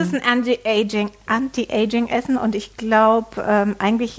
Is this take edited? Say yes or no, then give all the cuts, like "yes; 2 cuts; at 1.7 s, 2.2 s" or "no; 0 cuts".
no; 0 cuts